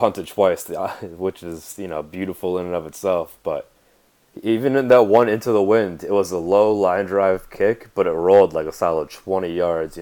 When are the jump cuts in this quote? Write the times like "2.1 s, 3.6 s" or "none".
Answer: none